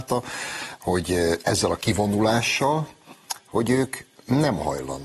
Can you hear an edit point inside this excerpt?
no; 0 cuts

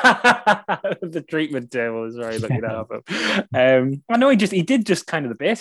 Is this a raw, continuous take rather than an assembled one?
yes; 0 cuts

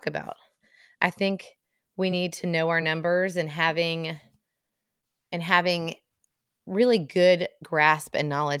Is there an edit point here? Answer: no; 0 cuts

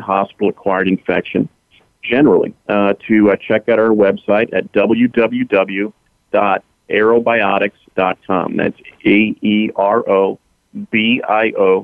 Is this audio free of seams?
yes; 0 cuts

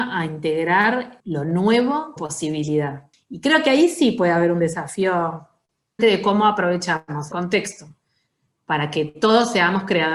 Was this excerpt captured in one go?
no; 4 cuts; at 1.2 s, 2.2 s, 6.0 s, 7.3 s

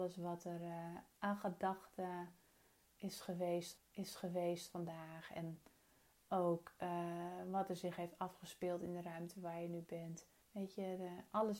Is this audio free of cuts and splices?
no; 2 cuts; at 3.8 s, 10.4 s

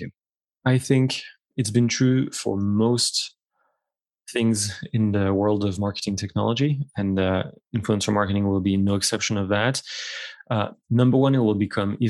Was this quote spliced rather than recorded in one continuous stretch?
no; 0 cuts

